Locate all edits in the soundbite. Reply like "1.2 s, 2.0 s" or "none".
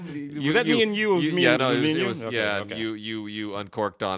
1.6 s